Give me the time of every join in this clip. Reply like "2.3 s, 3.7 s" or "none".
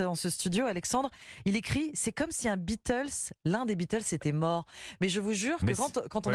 none